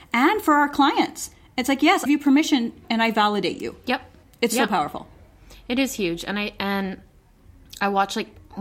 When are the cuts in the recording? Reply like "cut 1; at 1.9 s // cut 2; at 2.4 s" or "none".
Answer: cut 1; at 2.1 s // cut 2; at 4.2 s